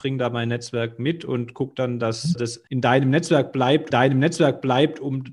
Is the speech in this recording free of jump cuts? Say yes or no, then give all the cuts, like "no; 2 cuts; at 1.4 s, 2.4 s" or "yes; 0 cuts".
no; 3 cuts; at 2.4 s, 2.7 s, 3.9 s